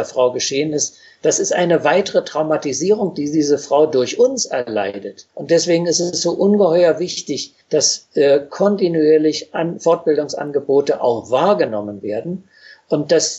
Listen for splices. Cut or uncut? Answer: cut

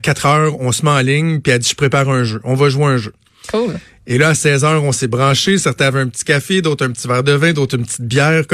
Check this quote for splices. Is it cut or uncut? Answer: uncut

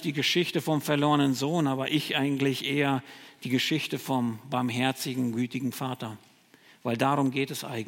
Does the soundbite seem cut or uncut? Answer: uncut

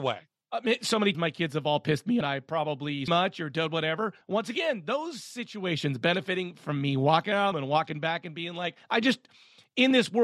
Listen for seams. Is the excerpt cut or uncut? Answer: cut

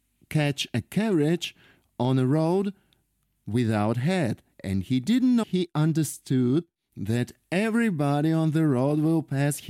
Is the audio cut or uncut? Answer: cut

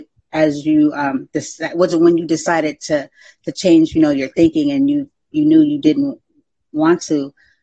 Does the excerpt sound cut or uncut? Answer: uncut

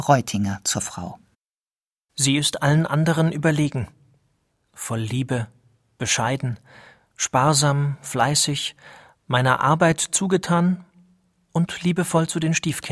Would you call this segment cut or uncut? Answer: uncut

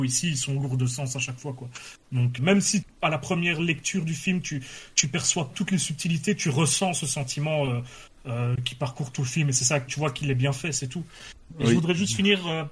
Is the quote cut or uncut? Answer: cut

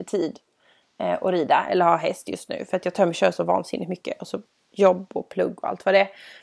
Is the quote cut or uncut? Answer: uncut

